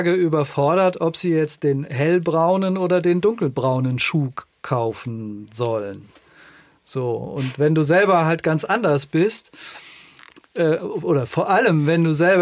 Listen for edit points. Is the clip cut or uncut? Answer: uncut